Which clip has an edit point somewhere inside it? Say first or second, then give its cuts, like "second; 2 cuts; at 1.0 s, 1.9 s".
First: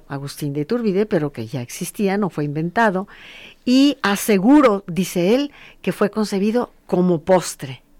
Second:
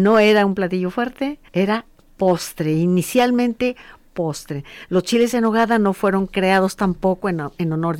second; 1 cut; at 1.5 s